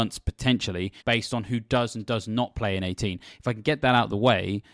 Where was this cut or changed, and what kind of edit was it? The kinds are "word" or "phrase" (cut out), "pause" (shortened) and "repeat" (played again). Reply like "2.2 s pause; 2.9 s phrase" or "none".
1.0 s pause